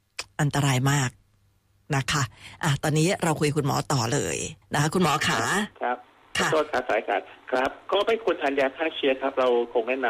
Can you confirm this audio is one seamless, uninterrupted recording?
no; 2 cuts; at 4.6 s, 5.8 s

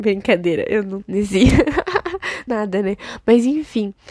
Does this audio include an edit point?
yes; 2 cuts; at 1.0 s, 2.5 s

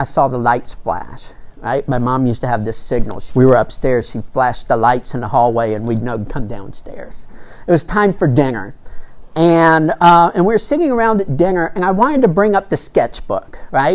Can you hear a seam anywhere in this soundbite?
yes; 1 cut; at 3.3 s

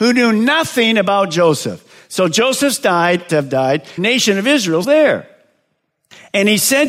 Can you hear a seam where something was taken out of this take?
yes; 3 cuts; at 3.3 s, 4.0 s, 4.8 s

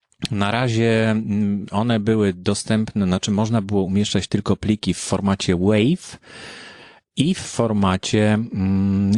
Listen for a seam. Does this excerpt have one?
no; 0 cuts

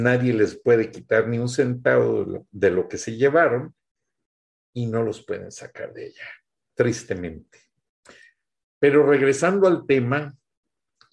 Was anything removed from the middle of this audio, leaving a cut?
no; 0 cuts

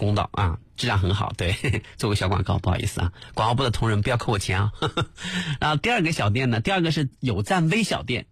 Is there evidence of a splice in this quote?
yes; 1 cut; at 7.1 s

